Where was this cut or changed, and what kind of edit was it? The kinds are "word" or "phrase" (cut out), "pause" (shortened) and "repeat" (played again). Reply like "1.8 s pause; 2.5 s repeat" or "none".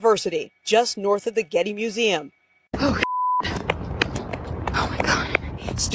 none

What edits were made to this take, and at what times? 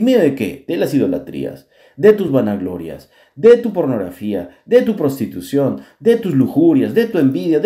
none

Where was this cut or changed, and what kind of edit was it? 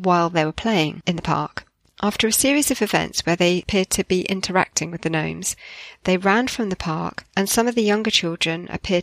7.3 s pause

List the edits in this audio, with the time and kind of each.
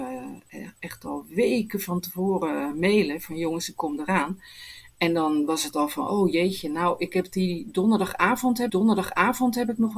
8.7 s repeat

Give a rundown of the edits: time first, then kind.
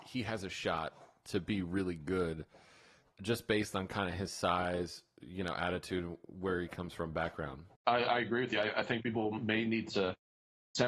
7.8 s pause

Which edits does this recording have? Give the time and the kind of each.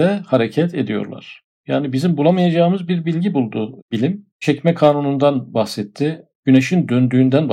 4.3 s pause

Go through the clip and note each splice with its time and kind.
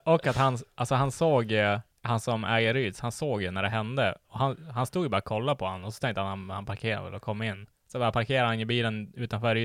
1.9 s pause; 7.7 s pause

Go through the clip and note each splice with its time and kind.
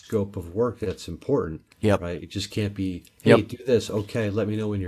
1.7 s pause

